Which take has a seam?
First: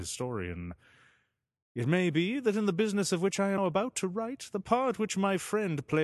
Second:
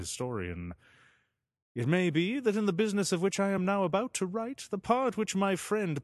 first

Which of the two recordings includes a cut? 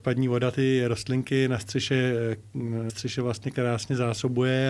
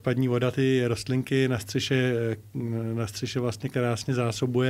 first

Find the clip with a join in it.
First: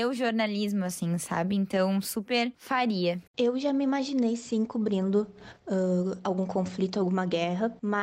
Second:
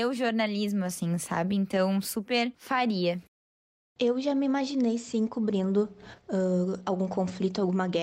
first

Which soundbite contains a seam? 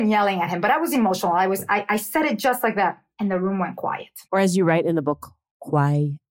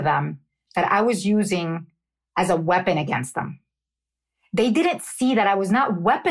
first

